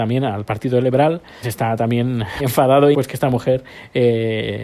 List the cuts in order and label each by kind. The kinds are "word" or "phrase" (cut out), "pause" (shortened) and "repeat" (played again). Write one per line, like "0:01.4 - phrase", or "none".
0:01.4 - word
0:02.4 - word
0:02.9 - word